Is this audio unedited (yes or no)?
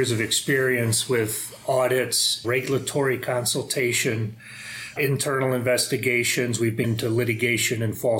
no